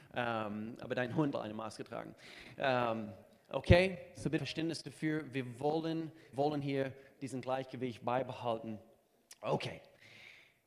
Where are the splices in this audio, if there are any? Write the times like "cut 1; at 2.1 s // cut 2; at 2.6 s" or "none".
cut 1; at 1.3 s // cut 2; at 4.4 s // cut 3; at 6.3 s